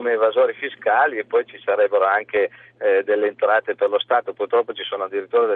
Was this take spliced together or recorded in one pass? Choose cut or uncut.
uncut